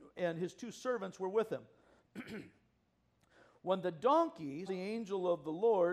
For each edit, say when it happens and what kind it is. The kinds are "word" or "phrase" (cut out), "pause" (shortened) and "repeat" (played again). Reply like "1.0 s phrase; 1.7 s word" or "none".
4.7 s word